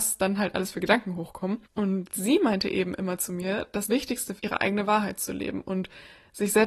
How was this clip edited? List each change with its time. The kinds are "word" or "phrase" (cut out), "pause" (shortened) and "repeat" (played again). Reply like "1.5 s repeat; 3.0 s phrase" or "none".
1.7 s pause; 3.9 s word; 4.4 s phrase